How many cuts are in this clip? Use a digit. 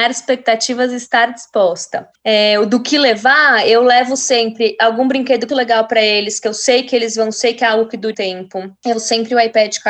4